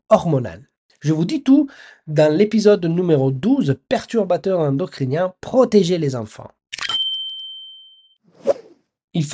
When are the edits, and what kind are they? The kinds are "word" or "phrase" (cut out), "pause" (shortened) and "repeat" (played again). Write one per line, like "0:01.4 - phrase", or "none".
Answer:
none